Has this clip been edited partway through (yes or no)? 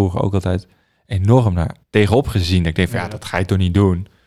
yes